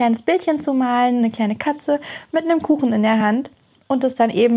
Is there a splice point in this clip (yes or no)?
no